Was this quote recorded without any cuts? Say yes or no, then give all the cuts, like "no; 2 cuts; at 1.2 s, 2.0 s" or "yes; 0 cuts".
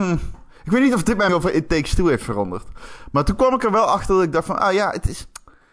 no; 1 cut; at 1.3 s